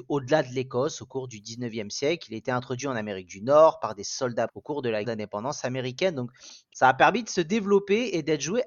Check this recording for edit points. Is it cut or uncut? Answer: cut